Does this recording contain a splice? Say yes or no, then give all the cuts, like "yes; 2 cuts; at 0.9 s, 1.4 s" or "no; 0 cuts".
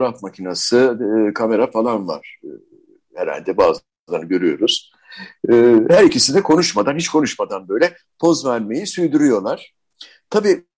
no; 0 cuts